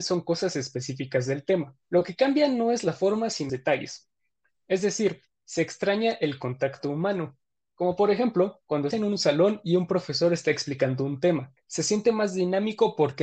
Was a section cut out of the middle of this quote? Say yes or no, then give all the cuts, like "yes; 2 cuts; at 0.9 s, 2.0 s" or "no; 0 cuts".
yes; 4 cuts; at 1.8 s, 3.5 s, 8.9 s, 11.6 s